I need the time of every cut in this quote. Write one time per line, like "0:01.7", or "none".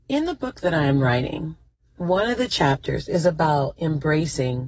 none